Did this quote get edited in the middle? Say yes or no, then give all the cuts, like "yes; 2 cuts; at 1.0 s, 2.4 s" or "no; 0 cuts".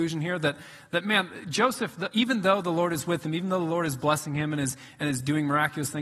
no; 0 cuts